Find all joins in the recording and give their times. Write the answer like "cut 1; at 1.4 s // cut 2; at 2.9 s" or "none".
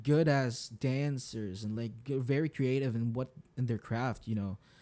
none